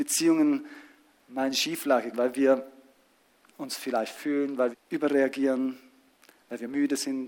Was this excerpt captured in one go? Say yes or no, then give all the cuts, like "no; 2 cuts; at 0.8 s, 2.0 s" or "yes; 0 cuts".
no; 3 cuts; at 2.1 s, 4.2 s, 4.7 s